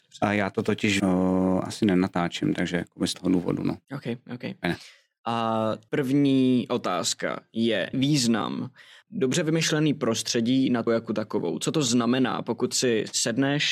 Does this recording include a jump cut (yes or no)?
yes